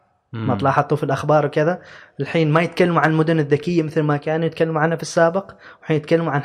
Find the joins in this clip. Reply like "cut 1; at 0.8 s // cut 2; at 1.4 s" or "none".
none